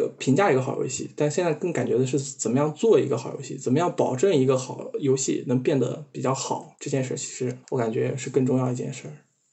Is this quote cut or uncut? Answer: cut